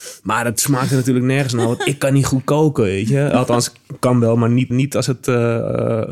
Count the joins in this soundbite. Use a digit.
1